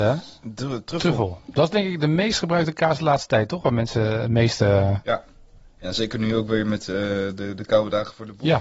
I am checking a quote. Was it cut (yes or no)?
no